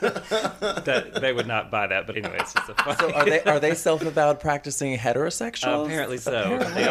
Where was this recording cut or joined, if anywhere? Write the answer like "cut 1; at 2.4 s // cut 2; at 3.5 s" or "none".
cut 1; at 2.1 s